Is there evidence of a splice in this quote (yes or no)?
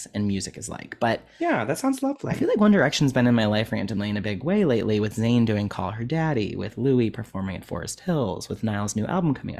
no